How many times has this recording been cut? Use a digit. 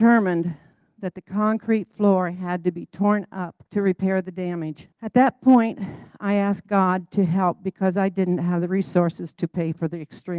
2